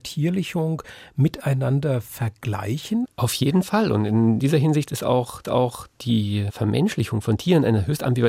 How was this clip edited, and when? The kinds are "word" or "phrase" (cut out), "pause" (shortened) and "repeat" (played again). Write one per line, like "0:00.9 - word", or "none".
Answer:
0:05.4 - repeat